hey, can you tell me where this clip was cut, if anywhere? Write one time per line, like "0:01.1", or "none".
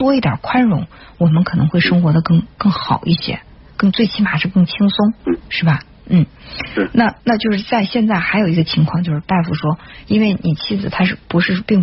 0:05.2
0:07.2